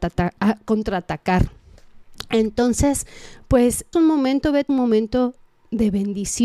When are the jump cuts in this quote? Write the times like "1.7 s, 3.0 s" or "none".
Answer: 3.9 s, 4.7 s